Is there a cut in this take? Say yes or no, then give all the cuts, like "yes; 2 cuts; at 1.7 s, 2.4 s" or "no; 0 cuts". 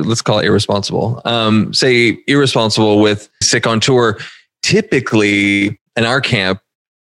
yes; 2 cuts; at 3.4 s, 5.9 s